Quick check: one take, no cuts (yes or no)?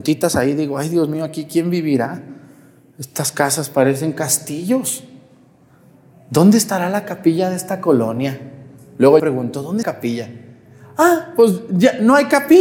no